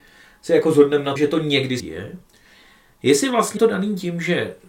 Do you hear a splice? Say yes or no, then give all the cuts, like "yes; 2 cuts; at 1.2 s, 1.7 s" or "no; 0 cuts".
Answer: yes; 3 cuts; at 1.2 s, 1.8 s, 3.6 s